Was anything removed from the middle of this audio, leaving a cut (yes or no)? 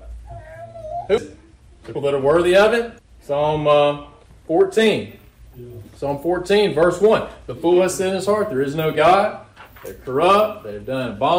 yes